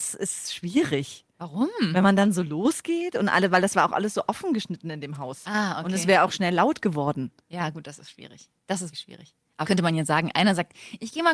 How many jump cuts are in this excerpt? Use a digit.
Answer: 2